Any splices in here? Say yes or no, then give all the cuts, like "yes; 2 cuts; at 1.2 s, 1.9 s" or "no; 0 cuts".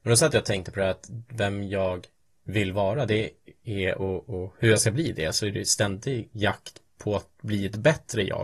no; 0 cuts